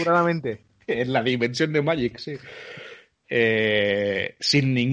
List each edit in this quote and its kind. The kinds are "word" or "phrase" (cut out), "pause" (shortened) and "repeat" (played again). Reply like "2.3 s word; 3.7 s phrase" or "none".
none